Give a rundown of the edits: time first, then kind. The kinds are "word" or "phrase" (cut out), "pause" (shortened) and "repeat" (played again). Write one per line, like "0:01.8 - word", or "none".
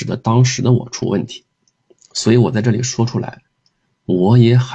0:01.8 - pause